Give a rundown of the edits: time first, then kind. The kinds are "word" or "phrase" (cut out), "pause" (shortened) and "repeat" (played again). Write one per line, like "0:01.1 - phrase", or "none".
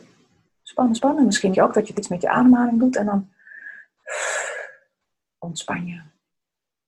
0:01.0 - word
0:01.5 - word
0:01.9 - word